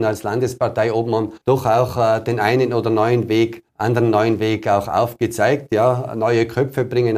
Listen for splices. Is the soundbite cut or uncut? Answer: cut